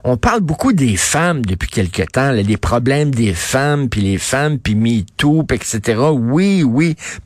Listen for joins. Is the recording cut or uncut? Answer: uncut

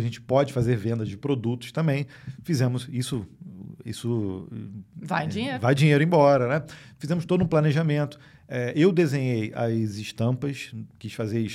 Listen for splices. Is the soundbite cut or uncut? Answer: uncut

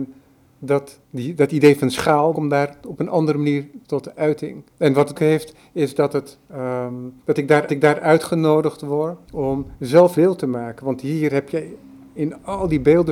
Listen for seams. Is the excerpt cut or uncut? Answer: cut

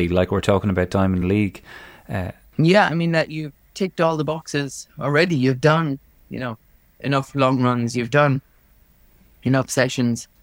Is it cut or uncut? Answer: uncut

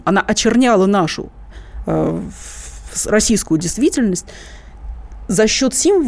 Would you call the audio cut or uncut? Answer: uncut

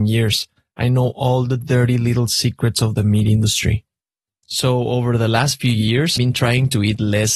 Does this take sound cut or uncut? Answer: cut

